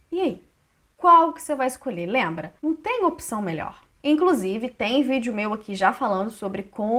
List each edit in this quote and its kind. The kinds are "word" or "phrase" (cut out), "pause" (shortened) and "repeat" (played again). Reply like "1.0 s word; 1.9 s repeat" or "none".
2.6 s pause